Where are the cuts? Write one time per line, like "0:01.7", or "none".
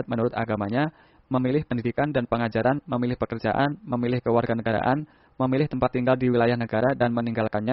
none